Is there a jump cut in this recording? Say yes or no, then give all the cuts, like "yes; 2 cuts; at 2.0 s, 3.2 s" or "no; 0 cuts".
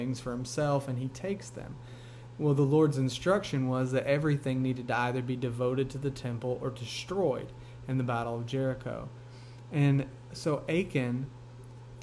no; 0 cuts